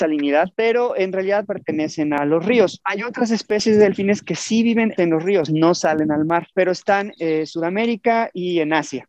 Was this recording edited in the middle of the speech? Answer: yes; 2 cuts; at 1.4 s, 5.0 s

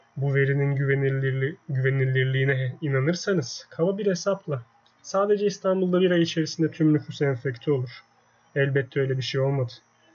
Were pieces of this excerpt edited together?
no; 0 cuts

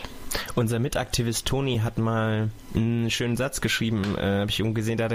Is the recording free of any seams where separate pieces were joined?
yes; 0 cuts

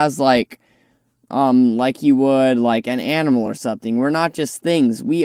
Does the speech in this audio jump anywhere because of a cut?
no; 0 cuts

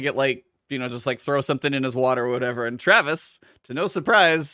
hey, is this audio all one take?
yes; 0 cuts

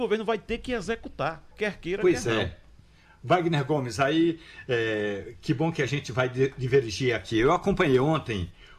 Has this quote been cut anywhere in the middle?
yes; 1 cut; at 1.5 s

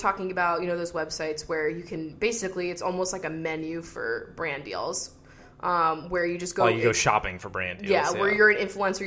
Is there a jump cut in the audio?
no; 0 cuts

